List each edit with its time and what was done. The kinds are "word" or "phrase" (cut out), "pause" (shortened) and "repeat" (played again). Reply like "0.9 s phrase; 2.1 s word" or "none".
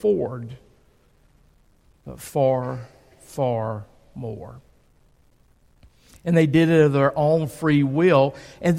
none